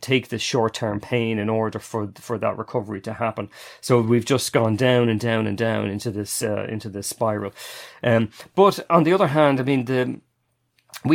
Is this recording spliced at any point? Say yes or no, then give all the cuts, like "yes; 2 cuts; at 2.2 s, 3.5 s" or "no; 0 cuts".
no; 0 cuts